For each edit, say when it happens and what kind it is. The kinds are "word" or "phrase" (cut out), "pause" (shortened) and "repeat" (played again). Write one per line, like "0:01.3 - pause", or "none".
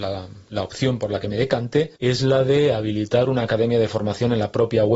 0:02.0 - pause